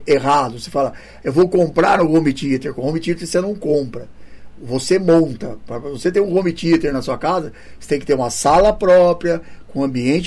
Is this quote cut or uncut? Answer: uncut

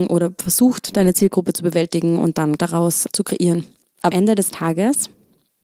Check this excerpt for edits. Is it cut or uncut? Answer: cut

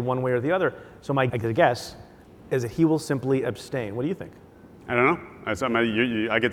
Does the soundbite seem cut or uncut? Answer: cut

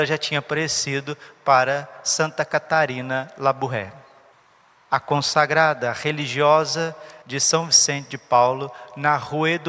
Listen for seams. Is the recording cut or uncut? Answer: cut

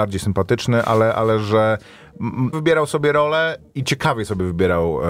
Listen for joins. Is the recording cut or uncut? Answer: cut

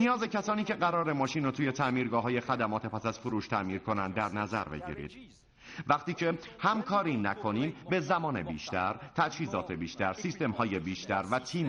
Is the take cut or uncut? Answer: uncut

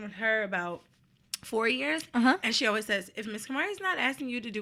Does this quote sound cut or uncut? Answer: uncut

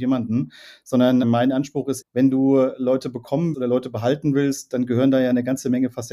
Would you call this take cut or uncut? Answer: cut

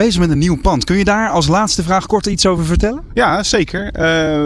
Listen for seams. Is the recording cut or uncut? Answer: uncut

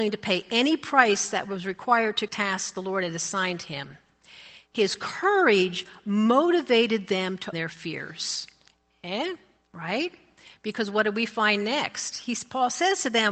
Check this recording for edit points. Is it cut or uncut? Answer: cut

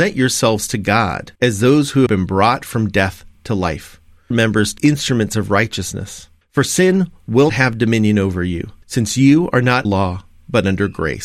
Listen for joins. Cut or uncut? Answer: cut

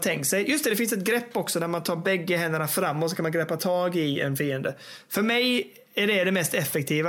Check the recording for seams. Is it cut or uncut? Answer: uncut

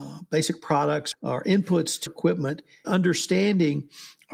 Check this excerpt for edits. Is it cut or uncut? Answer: cut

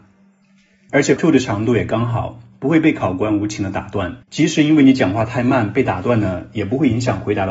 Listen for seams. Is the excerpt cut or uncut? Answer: cut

